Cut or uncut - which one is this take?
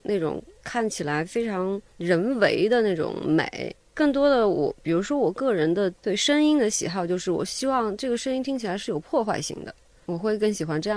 uncut